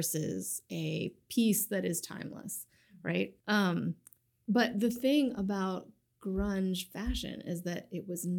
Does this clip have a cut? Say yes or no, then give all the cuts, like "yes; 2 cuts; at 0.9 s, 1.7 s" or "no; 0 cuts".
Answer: yes; 1 cut; at 3.4 s